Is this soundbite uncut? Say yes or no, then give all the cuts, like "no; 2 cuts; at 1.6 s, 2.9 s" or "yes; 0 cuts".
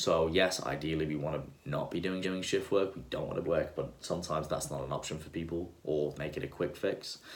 no; 3 cuts; at 2.2 s, 3.4 s, 6.1 s